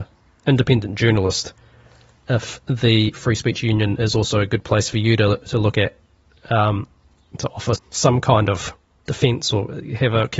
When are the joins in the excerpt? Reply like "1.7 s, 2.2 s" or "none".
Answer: 7.8 s